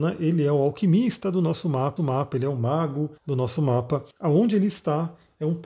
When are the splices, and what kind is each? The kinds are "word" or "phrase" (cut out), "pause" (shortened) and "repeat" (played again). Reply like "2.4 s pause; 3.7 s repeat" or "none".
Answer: 2.0 s repeat; 3.2 s pause; 4.1 s pause